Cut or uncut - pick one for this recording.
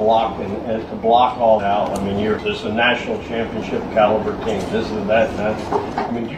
cut